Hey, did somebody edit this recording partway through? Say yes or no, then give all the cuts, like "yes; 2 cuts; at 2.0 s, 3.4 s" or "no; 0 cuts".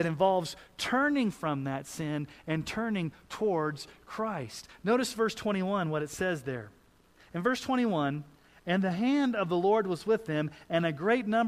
no; 0 cuts